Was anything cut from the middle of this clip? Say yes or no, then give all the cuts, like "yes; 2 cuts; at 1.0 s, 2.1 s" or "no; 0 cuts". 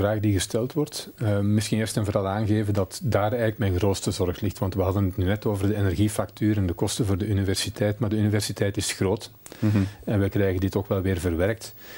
no; 0 cuts